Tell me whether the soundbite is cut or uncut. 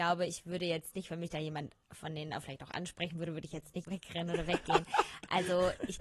cut